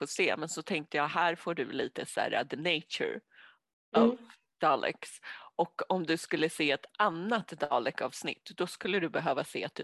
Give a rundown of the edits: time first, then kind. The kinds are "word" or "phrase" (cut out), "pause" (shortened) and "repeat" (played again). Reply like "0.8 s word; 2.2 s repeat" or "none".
none